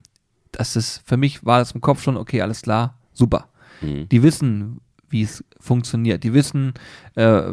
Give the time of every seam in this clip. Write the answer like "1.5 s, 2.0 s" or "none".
none